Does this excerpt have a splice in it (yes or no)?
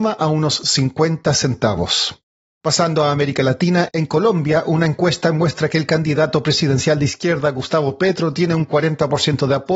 no